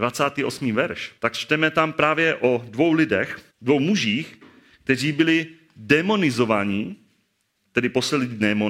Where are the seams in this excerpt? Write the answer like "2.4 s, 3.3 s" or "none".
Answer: 1.2 s, 3.5 s